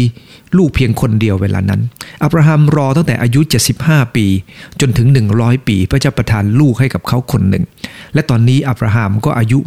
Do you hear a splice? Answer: no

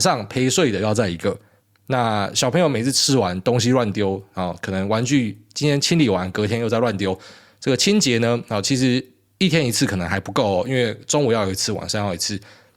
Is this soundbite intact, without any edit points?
yes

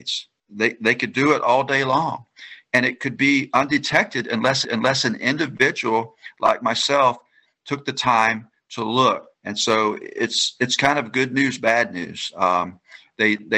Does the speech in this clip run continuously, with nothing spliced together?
no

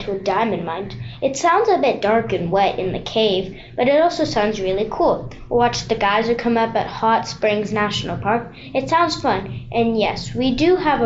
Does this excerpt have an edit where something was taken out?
no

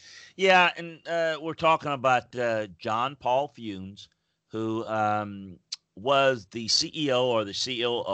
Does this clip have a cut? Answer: no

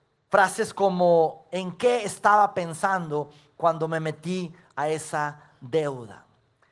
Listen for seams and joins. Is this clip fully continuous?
yes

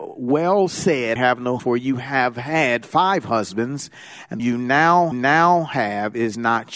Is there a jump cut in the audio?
yes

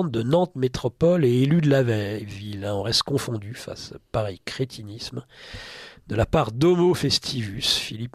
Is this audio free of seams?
yes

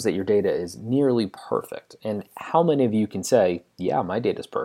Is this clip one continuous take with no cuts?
yes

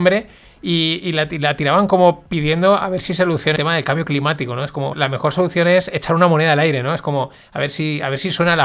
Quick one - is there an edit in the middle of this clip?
yes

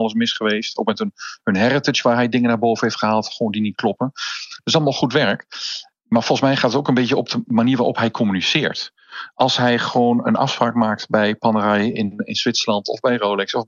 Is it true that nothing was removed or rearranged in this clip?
yes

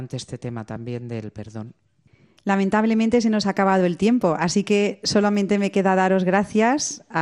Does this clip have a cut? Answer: no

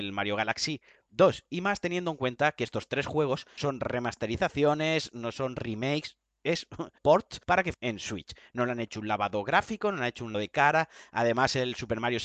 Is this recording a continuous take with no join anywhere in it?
no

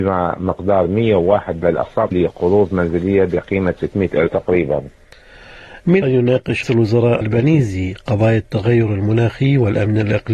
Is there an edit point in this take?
yes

